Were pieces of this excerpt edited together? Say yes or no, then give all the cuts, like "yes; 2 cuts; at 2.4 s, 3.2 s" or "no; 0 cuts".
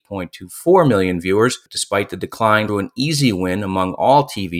yes; 1 cut; at 2.7 s